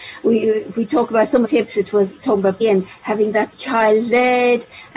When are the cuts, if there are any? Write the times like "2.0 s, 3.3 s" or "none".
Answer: 1.4 s, 2.6 s, 3.5 s